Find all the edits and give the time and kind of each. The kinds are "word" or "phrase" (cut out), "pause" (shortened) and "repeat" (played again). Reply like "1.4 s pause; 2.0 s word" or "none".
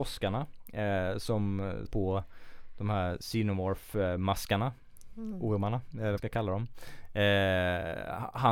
1.9 s word; 6.2 s phrase

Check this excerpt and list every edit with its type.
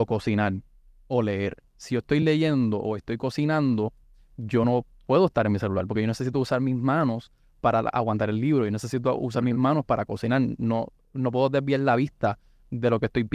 none

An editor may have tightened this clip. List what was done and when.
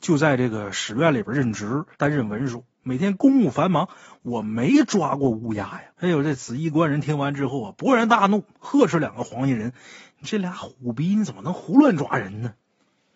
1.9 s pause; 5.9 s pause

